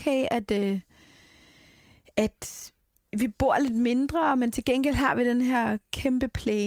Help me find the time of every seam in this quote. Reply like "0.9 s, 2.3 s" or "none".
none